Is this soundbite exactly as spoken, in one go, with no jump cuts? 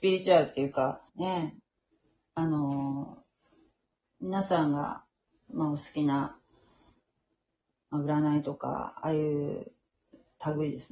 no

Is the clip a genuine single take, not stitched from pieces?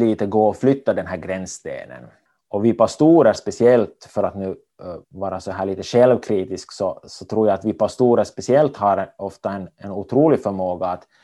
no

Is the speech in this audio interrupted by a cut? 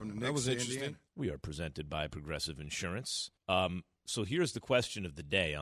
yes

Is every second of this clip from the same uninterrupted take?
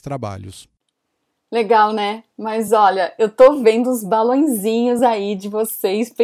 yes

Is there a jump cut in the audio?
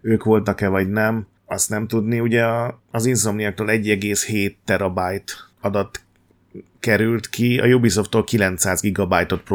yes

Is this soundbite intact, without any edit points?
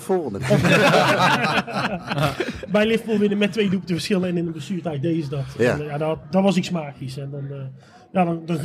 yes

